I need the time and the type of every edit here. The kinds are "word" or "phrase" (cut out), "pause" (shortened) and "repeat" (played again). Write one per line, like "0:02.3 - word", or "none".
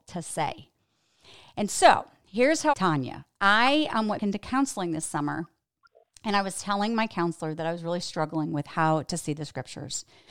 0:02.7 - phrase
0:04.2 - word